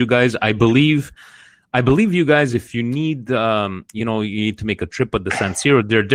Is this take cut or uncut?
uncut